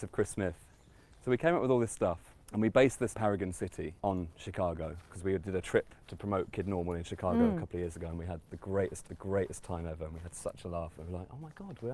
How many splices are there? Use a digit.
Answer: 5